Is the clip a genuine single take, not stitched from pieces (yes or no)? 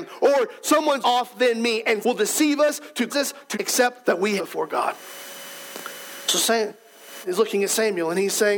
no